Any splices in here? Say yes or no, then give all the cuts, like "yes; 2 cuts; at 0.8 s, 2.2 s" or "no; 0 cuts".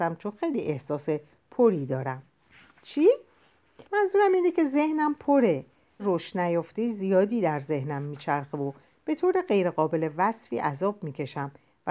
yes; 2 cuts; at 3.8 s, 6.0 s